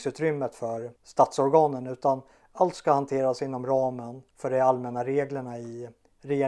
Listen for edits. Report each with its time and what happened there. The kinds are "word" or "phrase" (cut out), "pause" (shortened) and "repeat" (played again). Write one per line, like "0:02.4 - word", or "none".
0:01.0 - pause
0:04.3 - pause